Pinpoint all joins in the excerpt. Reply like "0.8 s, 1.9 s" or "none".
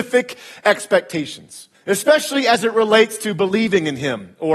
1.7 s